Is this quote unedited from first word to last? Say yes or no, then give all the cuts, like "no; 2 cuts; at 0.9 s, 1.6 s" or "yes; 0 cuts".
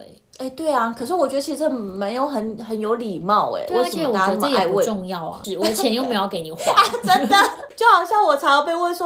yes; 0 cuts